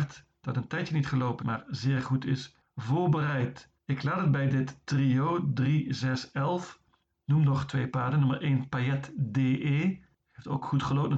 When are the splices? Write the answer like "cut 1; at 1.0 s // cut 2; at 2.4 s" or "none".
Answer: cut 1; at 1.4 s // cut 2; at 3.8 s // cut 3; at 7.0 s